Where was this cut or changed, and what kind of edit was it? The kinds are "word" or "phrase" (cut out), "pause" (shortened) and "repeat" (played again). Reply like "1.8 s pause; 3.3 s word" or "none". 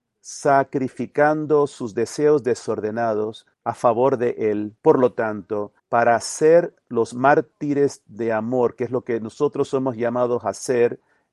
3.5 s pause; 4.8 s pause; 5.8 s pause